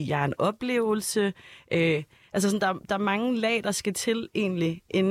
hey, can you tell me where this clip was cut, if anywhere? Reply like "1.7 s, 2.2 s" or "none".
none